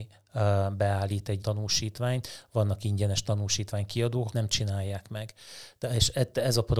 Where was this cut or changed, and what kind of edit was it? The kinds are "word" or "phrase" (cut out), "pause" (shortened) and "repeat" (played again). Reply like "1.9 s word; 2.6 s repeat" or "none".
1.4 s word; 4.3 s phrase